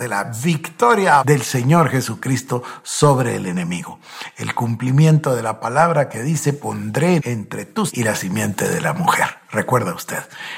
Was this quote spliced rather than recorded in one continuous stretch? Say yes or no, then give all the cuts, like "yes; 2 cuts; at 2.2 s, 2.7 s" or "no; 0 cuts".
yes; 3 cuts; at 1.2 s, 7.2 s, 7.9 s